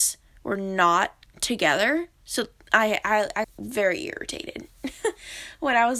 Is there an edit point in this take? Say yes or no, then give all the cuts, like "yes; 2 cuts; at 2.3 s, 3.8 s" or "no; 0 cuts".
yes; 2 cuts; at 1.3 s, 3.4 s